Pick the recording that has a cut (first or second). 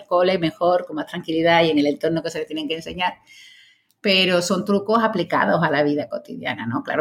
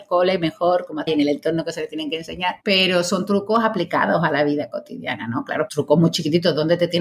second